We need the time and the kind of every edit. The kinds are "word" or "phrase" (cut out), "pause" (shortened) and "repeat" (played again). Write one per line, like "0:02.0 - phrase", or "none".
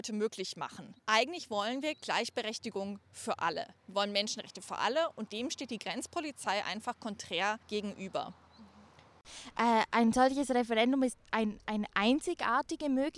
0:01.0 - pause
0:03.8 - pause
0:07.6 - pause
0:11.2 - pause